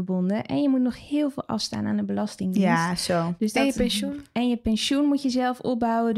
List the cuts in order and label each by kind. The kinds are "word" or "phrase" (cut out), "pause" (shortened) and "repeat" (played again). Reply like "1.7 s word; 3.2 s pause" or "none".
none